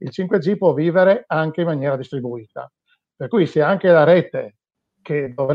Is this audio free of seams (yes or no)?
yes